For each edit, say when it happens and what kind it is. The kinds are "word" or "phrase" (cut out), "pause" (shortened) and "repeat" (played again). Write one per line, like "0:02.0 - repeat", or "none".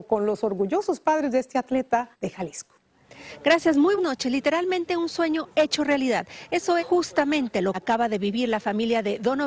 0:02.1 - pause
0:04.0 - word
0:06.8 - word
0:07.7 - word

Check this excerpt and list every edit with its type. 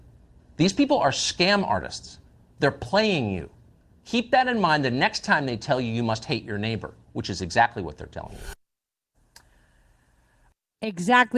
none

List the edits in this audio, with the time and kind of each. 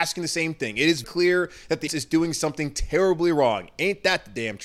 0:01.0 - word
0:01.9 - word

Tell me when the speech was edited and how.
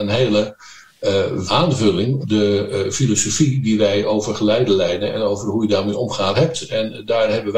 0:01.5 - word
0:02.2 - word
0:06.3 - word

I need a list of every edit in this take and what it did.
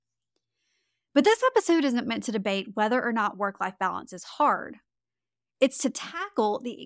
none

